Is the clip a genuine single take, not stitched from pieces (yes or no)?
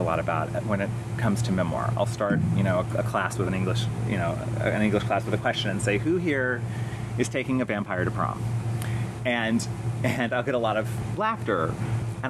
yes